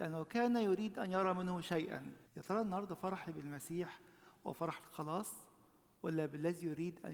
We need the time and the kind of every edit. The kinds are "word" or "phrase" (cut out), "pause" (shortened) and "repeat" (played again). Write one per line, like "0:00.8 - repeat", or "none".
0:02.3 - pause